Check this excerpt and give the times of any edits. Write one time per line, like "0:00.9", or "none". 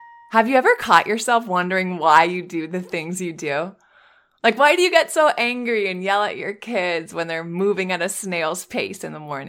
none